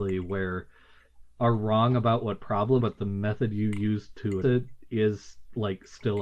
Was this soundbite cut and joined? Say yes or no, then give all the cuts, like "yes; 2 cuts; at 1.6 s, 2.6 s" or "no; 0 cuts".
yes; 3 cuts; at 1.2 s, 2.8 s, 4.4 s